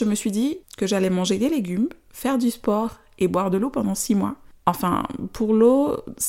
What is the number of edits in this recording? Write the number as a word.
zero